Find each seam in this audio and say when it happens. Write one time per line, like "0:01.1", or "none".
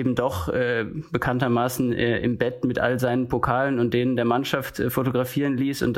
none